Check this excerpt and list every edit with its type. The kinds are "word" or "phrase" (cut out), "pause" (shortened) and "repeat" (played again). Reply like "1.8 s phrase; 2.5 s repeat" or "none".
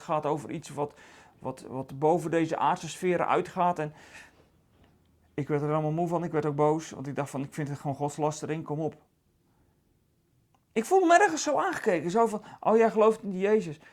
none